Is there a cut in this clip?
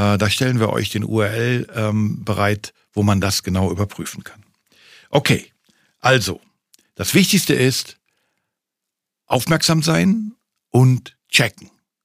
no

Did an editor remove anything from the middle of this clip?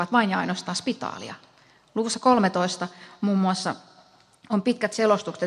no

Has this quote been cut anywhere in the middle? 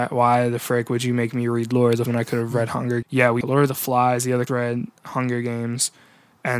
yes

